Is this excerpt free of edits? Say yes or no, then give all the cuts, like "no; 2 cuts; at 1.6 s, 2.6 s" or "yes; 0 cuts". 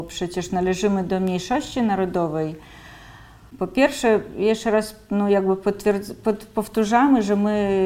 yes; 0 cuts